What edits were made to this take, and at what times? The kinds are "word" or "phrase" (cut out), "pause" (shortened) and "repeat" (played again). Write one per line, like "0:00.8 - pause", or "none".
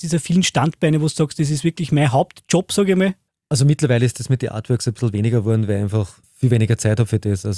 0:03.3 - pause
0:06.2 - pause